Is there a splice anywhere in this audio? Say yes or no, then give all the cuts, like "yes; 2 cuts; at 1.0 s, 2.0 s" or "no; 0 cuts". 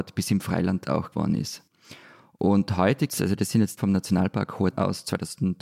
yes; 4 cuts; at 1.1 s, 3.1 s, 3.8 s, 4.7 s